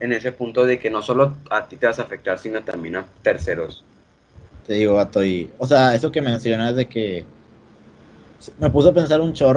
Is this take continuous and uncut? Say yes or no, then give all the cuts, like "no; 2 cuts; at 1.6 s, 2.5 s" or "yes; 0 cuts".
no; 1 cut; at 4.6 s